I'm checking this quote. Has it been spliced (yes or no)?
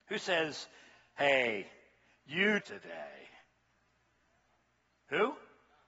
yes